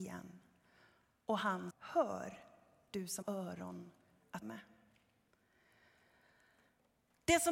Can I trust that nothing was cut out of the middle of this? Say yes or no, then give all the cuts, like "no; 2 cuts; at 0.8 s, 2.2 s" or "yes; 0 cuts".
no; 3 cuts; at 1.7 s, 3.2 s, 4.4 s